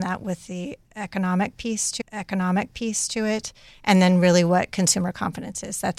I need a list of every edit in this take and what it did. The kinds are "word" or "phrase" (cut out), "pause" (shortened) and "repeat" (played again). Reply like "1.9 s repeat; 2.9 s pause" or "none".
2.0 s repeat